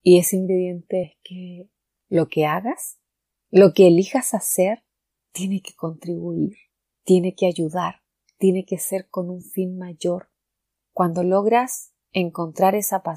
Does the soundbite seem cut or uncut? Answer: uncut